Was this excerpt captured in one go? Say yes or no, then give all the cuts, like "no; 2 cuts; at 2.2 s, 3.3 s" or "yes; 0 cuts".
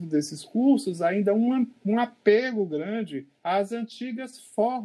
no; 1 cut; at 3.4 s